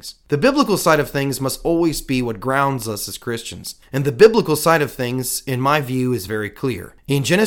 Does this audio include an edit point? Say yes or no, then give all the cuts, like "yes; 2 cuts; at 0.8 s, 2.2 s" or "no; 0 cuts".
no; 0 cuts